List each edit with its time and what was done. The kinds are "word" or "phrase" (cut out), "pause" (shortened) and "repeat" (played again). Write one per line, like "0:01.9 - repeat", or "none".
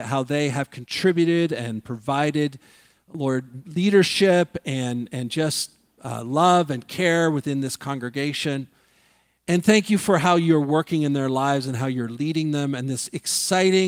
none